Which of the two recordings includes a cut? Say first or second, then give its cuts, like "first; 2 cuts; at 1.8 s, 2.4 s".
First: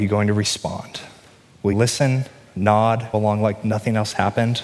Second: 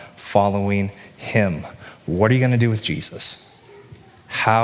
first; 2 cuts; at 1.7 s, 3.1 s